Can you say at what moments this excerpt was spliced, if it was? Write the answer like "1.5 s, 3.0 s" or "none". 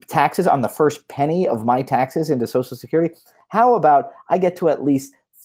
none